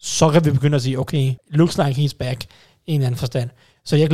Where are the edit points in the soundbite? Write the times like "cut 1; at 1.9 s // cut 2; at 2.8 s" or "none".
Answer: cut 1; at 1.4 s